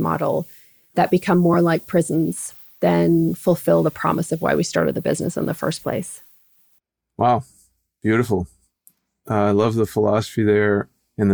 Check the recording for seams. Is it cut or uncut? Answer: uncut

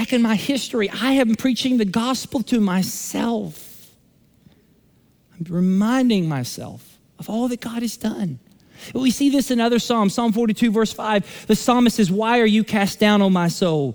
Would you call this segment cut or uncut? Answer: uncut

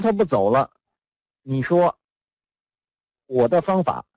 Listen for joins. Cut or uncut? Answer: uncut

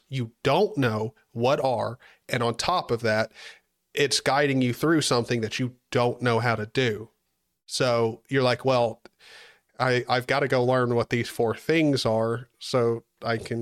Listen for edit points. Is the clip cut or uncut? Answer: uncut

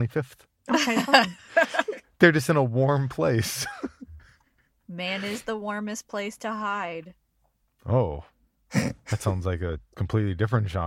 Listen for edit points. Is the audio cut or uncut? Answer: uncut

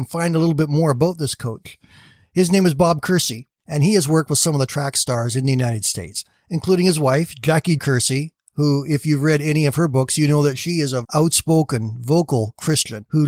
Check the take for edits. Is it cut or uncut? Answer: cut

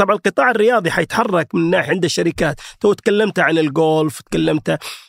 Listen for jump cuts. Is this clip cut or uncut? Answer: cut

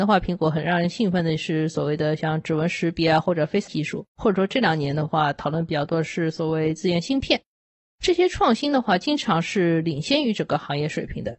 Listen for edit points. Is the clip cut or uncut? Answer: cut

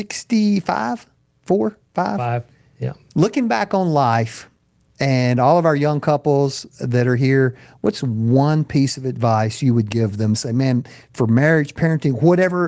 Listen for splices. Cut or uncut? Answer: uncut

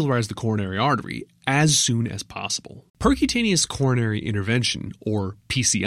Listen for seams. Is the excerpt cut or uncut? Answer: cut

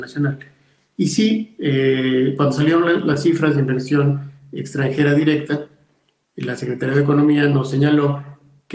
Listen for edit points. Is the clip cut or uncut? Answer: uncut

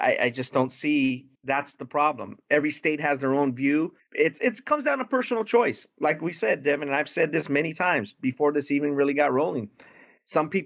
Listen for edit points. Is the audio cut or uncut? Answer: cut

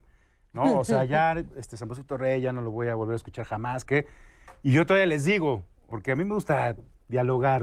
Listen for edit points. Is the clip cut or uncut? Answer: cut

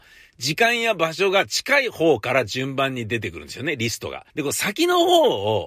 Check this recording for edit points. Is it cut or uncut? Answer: cut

